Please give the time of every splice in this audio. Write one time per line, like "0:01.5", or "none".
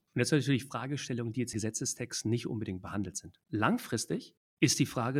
0:01.5
0:03.4